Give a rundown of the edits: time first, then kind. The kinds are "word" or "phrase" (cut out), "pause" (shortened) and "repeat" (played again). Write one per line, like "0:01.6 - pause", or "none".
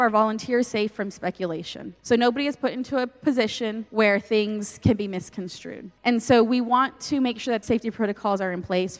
0:02.0 - pause
0:03.9 - pause
0:06.0 - pause
0:07.6 - word